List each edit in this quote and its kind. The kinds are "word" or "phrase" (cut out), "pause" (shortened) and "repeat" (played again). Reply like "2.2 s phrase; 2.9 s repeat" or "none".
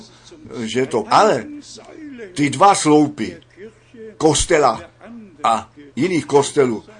1.0 s phrase; 5.9 s word